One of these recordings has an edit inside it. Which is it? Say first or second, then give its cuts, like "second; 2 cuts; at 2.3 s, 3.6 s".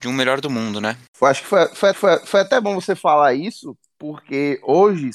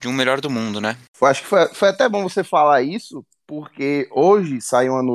first; 1 cut; at 1.9 s